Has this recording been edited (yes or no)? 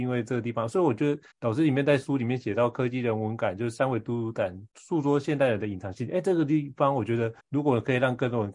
yes